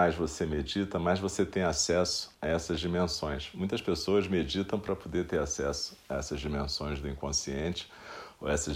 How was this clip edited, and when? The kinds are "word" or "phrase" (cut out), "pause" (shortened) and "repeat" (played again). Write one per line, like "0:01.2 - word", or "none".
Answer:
0:02.3 - pause